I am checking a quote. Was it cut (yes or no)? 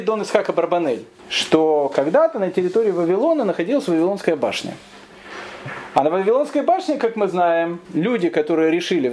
yes